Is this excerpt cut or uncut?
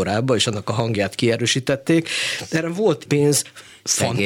cut